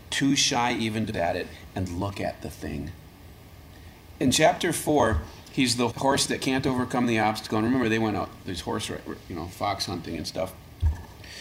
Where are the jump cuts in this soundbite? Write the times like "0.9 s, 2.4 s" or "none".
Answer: 1.1 s, 5.9 s